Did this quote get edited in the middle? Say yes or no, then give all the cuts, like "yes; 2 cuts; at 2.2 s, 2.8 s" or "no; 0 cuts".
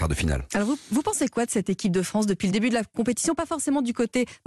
no; 0 cuts